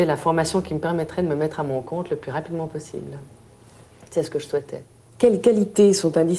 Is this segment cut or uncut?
uncut